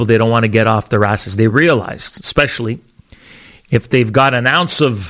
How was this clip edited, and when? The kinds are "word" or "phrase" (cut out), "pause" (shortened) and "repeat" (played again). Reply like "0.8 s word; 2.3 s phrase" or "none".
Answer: none